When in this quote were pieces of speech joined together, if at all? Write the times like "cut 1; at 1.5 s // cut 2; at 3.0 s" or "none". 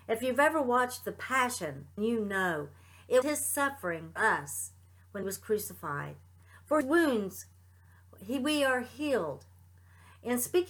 cut 1; at 2.0 s // cut 2; at 3.2 s // cut 3; at 4.2 s // cut 4; at 5.2 s // cut 5; at 6.8 s